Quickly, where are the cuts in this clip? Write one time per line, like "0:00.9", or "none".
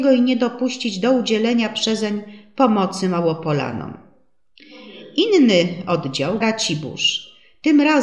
0:06.4